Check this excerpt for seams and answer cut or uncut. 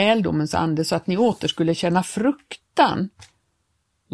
uncut